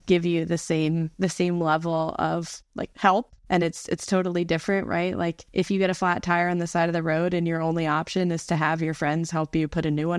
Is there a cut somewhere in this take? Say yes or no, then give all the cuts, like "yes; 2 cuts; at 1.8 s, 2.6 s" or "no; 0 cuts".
no; 0 cuts